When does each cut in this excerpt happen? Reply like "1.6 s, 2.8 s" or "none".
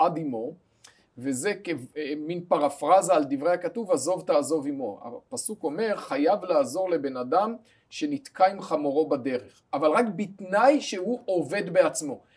none